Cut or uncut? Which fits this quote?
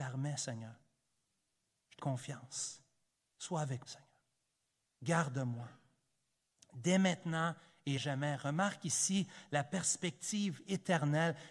cut